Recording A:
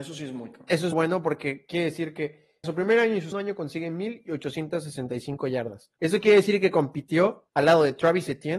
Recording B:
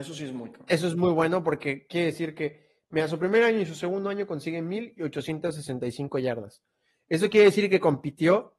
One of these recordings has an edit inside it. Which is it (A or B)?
A